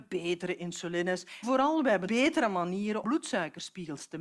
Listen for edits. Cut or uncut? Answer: cut